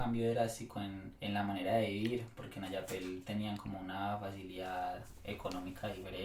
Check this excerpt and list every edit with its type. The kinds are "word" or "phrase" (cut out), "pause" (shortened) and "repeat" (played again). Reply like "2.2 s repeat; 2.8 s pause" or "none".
1.1 s pause